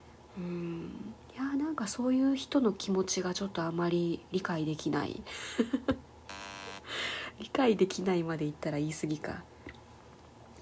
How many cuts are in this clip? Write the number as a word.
one